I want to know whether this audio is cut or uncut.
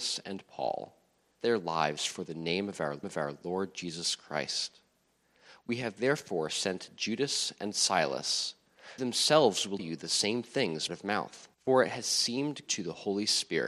cut